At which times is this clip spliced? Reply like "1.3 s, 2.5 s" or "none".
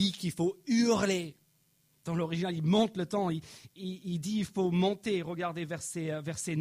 none

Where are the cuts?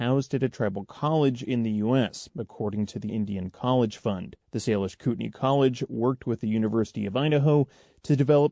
3.1 s, 4.4 s

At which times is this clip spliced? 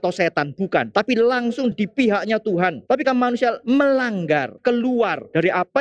1.7 s, 3.0 s, 4.6 s

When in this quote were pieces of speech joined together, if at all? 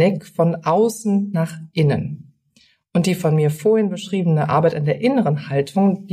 none

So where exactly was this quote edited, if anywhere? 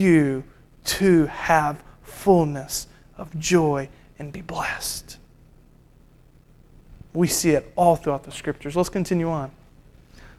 none

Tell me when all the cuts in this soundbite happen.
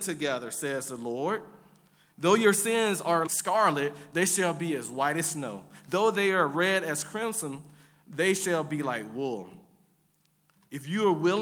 3.3 s

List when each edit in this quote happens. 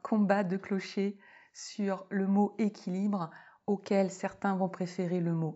none

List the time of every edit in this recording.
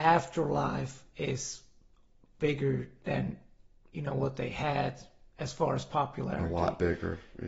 none

